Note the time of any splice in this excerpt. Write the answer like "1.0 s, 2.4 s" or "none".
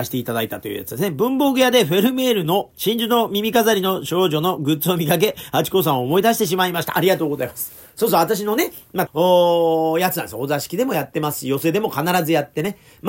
2.7 s, 7.8 s, 9.1 s